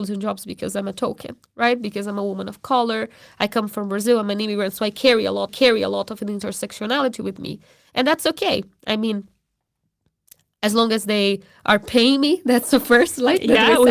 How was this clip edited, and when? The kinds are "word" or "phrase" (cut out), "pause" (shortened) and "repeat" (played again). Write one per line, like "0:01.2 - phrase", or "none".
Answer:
0:05.5 - repeat